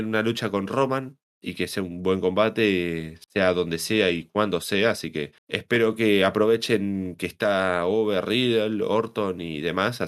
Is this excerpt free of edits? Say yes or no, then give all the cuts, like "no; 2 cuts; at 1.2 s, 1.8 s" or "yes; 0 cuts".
no; 1 cut; at 5.4 s